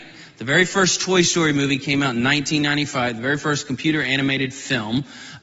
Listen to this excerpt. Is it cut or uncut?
uncut